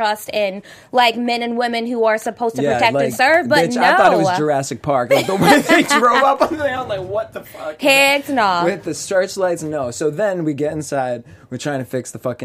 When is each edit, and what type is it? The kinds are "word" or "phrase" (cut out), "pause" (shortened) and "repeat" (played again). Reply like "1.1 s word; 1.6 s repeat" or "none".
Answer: none